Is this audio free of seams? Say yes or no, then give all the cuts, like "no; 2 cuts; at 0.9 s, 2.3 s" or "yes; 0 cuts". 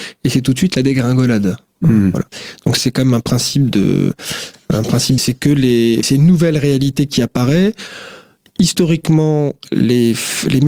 no; 3 cuts; at 2.8 s, 5.2 s, 6.0 s